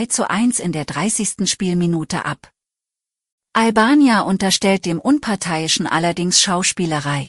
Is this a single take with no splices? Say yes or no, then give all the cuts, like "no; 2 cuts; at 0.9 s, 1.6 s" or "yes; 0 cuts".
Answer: yes; 0 cuts